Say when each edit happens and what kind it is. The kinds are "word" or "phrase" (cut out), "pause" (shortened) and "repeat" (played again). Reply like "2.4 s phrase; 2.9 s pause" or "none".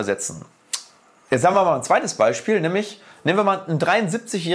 none